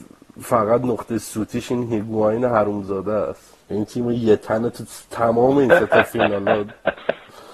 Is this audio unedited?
no; 1 cut; at 3.6 s

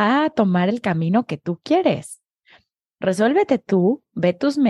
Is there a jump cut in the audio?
no; 0 cuts

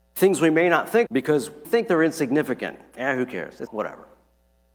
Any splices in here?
yes; 3 cuts; at 1.1 s, 1.6 s, 3.7 s

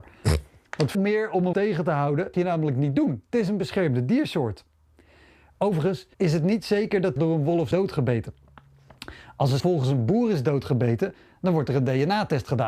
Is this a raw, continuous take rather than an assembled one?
no; 7 cuts; at 0.9 s, 1.5 s, 2.3 s, 6.1 s, 7.2 s, 7.7 s, 9.6 s

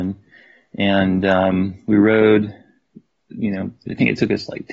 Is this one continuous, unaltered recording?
yes; 0 cuts

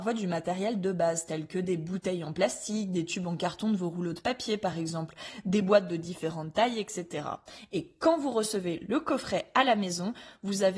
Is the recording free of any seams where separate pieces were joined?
yes; 0 cuts

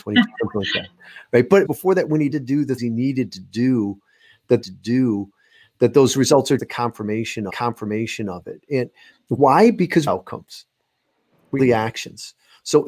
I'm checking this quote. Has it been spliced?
yes; 8 cuts; at 1.6 s, 2.3 s, 2.8 s, 4.6 s, 6.6 s, 7.5 s, 10.1 s, 11.6 s

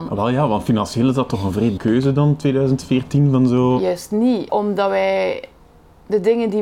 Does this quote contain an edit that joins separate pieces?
yes; 2 cuts; at 1.8 s, 4.5 s

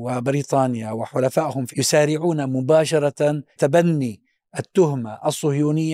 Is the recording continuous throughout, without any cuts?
no; 2 cuts; at 1.7 s, 3.6 s

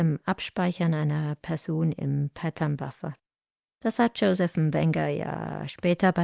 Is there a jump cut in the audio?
no; 0 cuts

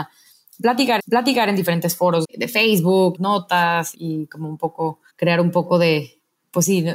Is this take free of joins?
no; 5 cuts; at 1.0 s, 2.2 s, 3.1 s, 3.9 s, 5.1 s

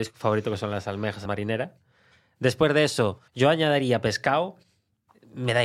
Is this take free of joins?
no; 2 cuts; at 1.3 s, 3.3 s

